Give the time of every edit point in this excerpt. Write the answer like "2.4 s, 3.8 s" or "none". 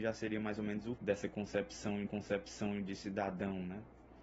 0.9 s, 2.1 s